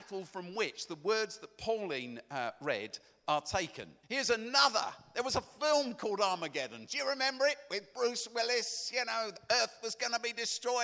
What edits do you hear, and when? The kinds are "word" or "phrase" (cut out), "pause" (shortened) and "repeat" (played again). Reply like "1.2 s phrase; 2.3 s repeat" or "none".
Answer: 4.0 s pause